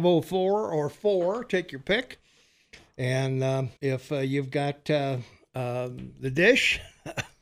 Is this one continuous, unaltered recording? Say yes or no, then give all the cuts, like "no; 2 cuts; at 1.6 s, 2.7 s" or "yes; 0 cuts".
no; 1 cut; at 3.8 s